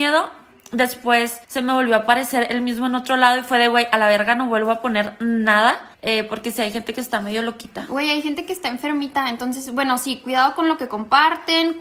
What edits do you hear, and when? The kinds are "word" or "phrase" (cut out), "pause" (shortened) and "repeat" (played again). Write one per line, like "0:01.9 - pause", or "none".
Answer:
0:01.4 - pause
0:05.9 - pause

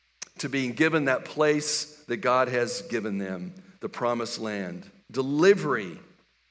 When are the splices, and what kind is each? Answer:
0:05.0 - pause

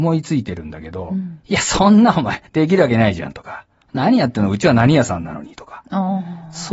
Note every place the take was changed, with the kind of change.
0:02.5 - pause

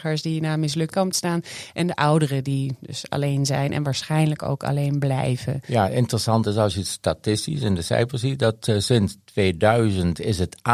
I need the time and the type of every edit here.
0:00.9 - phrase

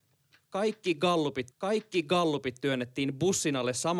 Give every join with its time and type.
0:01.5 - repeat

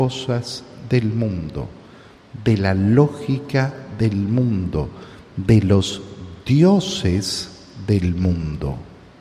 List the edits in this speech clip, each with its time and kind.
none

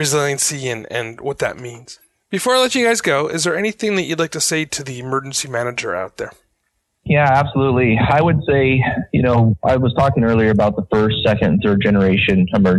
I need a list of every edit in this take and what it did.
none

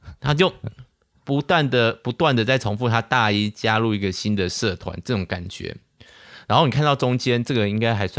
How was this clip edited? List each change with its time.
none

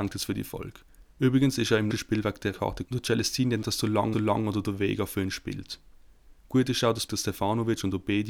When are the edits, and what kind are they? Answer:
0:01.1 - pause
0:01.9 - word
0:02.5 - word
0:02.8 - word
0:03.6 - phrase
0:04.1 - repeat
0:06.4 - pause
0:07.1 - phrase

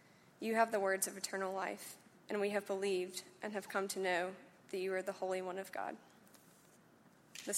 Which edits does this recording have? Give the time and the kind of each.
0:02.2 - pause
0:04.6 - pause

